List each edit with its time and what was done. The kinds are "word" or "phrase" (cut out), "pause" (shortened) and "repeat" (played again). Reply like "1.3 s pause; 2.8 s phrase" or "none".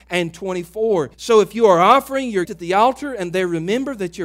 1.1 s pause; 2.4 s word